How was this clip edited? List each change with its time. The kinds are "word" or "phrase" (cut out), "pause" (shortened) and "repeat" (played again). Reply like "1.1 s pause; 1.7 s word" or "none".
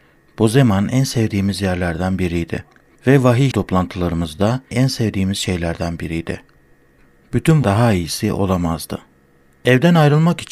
3.5 s word; 4.7 s word; 7.6 s word